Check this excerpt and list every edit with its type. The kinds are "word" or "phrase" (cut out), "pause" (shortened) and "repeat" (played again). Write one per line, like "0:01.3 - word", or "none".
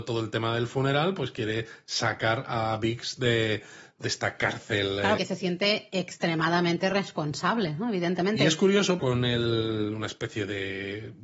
0:05.2 - phrase
0:09.0 - phrase